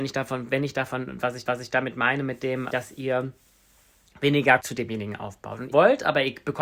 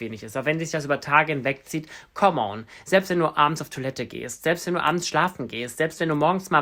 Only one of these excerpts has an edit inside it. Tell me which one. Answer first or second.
first